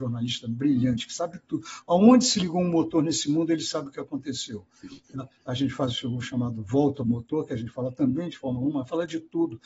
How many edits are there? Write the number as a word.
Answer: one